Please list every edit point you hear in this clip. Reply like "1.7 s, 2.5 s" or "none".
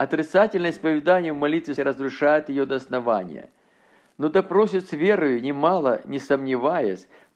1.8 s